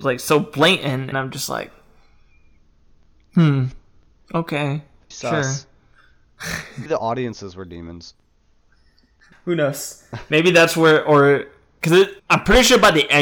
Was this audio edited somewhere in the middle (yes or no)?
yes